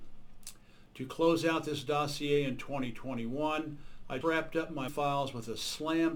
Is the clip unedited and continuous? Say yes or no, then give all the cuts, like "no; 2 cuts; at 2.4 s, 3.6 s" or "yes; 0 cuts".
no; 2 cuts; at 4.2 s, 4.9 s